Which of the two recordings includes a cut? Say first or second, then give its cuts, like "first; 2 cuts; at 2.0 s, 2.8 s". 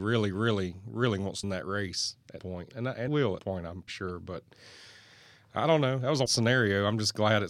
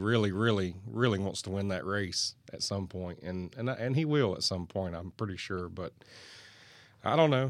first; 7 cuts; at 1.4 s, 2.4 s, 2.7 s, 3.1 s, 3.4 s, 3.9 s, 6.3 s